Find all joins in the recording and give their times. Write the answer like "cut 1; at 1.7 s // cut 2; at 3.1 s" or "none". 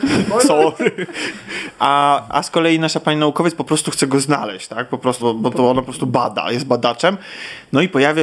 cut 1; at 5.2 s